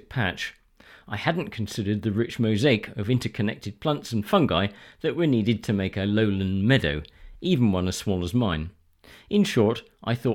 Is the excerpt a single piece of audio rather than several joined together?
yes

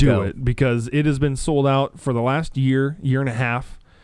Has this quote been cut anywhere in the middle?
no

